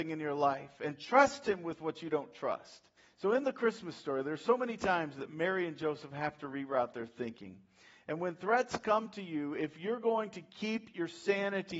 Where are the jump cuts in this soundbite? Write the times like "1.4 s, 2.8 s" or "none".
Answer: 3.0 s

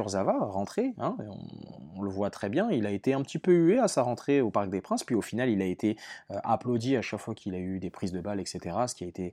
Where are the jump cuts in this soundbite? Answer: none

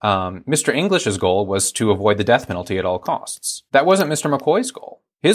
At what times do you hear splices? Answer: 3.7 s

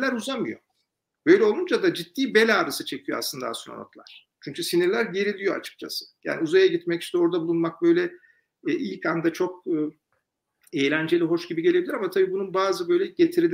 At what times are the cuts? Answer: none

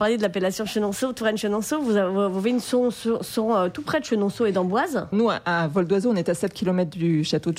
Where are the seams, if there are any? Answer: 5.1 s

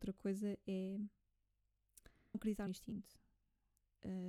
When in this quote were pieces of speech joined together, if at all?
2.3 s, 2.7 s

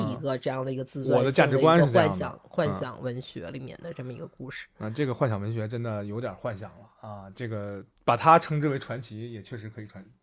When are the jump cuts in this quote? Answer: 8.0 s

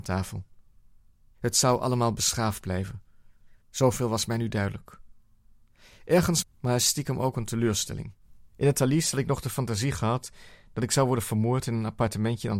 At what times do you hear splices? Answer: 3.6 s, 6.4 s, 8.5 s

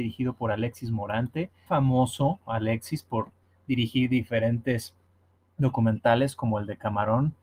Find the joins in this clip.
1.7 s

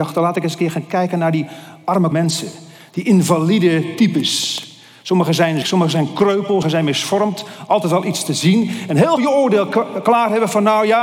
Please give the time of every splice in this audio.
2.1 s, 5.6 s, 6.6 s, 9.2 s

